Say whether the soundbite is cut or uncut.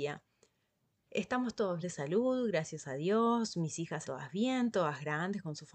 cut